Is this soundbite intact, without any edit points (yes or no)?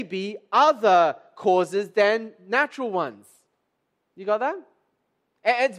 yes